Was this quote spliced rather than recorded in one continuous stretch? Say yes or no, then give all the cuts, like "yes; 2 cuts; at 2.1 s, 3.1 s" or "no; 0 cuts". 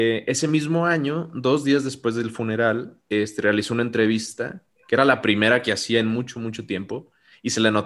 yes; 1 cut; at 3.0 s